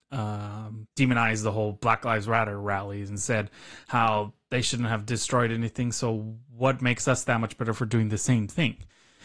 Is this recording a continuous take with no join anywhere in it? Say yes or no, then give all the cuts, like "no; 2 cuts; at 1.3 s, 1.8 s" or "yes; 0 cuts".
no; 1 cut; at 0.9 s